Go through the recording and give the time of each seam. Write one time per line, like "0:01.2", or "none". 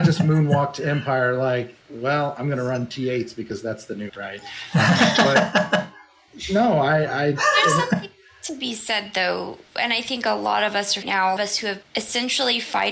0:01.8
0:04.1
0:09.7
0:11.0
0:11.4
0:11.8